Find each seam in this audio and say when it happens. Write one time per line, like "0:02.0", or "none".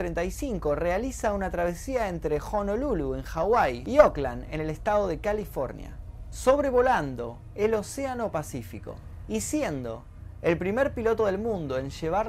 none